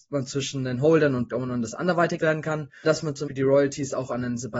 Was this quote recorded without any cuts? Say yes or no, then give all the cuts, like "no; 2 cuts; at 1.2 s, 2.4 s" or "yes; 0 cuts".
no; 4 cuts; at 1.3 s, 2.2 s, 2.8 s, 3.3 s